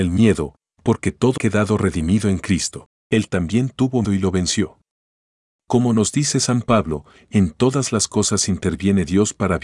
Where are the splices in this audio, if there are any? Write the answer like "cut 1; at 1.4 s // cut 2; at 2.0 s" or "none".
cut 1; at 1.4 s // cut 2; at 3.0 s // cut 3; at 4.0 s